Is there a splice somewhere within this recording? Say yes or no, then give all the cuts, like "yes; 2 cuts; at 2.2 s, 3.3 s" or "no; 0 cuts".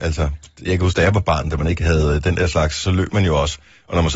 no; 0 cuts